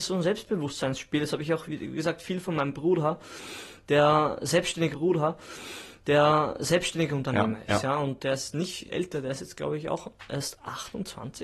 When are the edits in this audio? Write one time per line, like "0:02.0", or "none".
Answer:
0:01.7
0:04.9
0:08.9